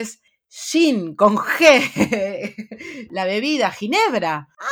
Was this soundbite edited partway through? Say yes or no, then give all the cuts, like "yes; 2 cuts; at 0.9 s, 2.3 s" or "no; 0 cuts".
no; 0 cuts